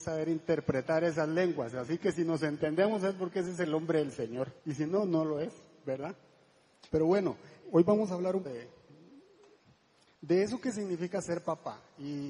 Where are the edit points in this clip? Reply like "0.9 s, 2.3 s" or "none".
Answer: 4.6 s, 6.9 s, 7.6 s, 8.5 s